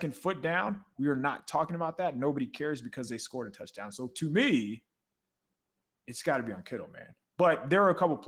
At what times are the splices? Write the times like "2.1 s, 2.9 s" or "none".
none